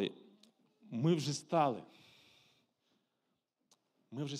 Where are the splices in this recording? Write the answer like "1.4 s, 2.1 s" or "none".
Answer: none